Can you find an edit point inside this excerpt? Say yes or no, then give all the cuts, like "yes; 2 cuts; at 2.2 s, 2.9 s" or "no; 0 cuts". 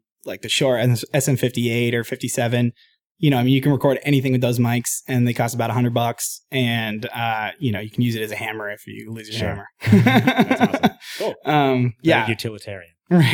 no; 0 cuts